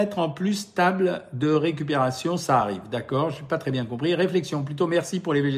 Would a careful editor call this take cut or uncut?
uncut